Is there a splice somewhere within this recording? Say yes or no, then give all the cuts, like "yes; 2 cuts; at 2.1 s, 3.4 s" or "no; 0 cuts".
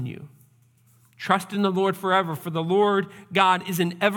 no; 0 cuts